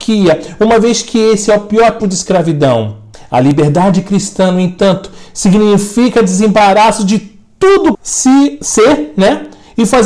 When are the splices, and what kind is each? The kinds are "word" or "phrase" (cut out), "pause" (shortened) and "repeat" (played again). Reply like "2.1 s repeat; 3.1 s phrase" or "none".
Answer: 2.0 s word; 3.1 s pause; 7.9 s word